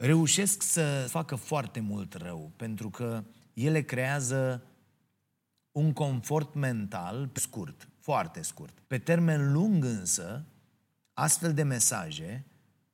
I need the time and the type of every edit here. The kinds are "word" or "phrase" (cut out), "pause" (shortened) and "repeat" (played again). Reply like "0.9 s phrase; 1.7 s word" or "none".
1.1 s word; 7.4 s word; 8.8 s pause

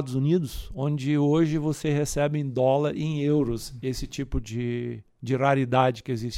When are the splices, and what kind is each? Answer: none

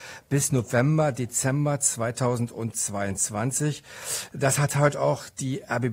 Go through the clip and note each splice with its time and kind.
none

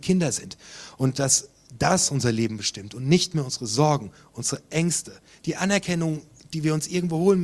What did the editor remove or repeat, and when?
none

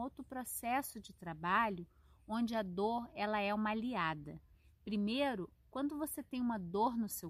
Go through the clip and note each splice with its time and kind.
none

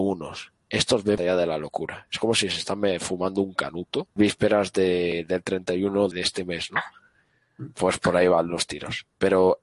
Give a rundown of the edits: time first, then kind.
1.2 s word; 4.2 s phrase; 6.1 s word

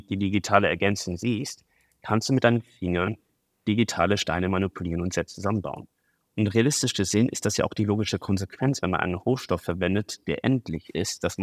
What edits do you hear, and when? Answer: none

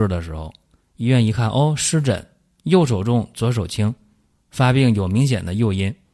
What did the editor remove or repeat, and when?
none

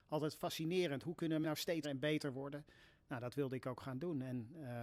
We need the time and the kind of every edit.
1.4 s word; 1.8 s word

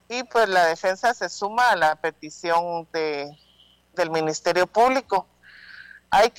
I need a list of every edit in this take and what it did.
none

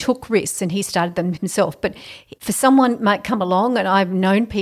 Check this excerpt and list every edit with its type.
2.4 s pause

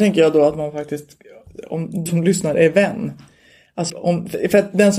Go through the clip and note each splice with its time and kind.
2.1 s word; 3.9 s word

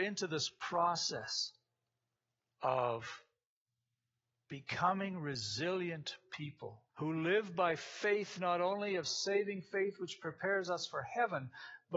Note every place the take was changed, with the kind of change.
6.9 s pause

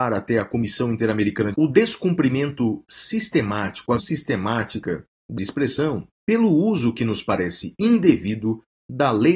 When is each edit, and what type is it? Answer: 1.5 s phrase; 4.0 s word; 5.4 s phrase; 6.1 s pause

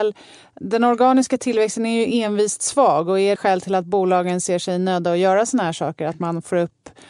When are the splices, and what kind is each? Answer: 3.4 s phrase

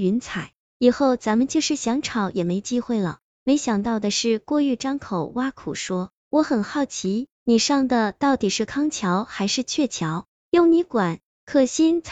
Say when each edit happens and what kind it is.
7.3 s pause

